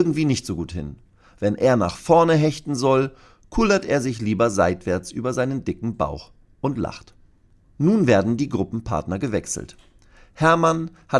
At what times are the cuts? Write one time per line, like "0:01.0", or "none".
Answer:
none